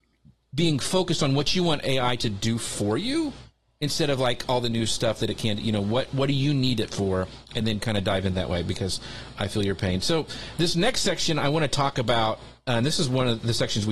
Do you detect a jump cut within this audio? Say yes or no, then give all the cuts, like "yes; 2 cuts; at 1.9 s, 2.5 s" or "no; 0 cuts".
no; 0 cuts